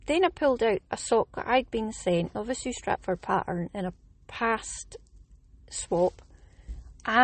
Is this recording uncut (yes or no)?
yes